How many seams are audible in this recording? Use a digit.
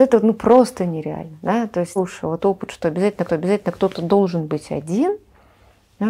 3